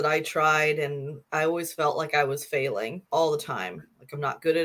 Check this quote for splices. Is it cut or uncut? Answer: cut